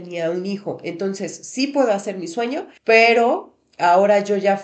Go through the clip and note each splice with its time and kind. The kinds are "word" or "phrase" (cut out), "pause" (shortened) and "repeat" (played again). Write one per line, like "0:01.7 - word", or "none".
0:02.8 - pause